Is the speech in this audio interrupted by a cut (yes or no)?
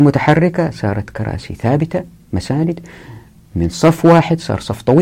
no